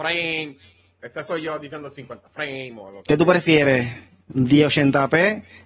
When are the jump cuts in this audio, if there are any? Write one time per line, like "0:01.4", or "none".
none